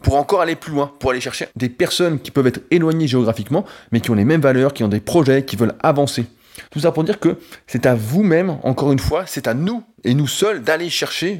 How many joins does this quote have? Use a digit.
3